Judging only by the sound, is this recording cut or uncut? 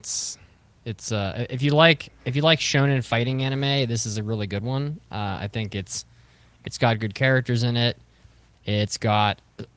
uncut